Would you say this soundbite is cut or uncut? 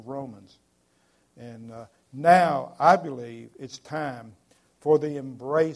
uncut